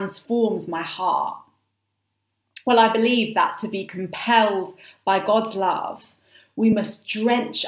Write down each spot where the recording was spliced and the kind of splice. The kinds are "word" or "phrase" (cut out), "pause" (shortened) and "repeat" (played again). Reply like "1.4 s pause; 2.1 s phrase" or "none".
none